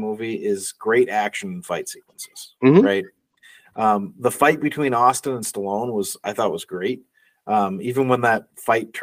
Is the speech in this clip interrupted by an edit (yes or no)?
no